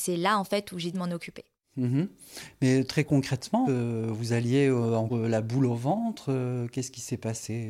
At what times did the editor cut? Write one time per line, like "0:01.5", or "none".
0:00.9
0:03.6
0:05.1